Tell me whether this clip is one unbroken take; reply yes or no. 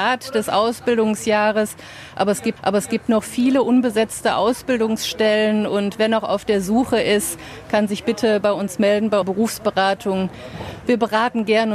no